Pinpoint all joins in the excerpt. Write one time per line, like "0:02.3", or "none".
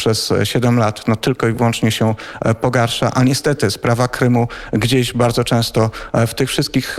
none